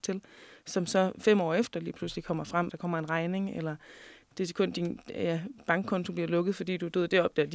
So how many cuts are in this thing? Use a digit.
1